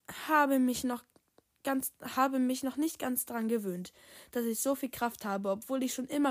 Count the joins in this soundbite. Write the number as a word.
zero